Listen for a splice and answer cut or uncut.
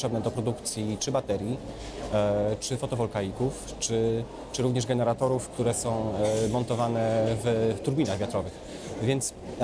uncut